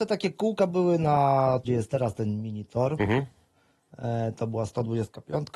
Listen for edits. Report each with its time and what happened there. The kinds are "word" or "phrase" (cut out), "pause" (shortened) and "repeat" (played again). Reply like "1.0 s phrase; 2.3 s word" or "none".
1.6 s word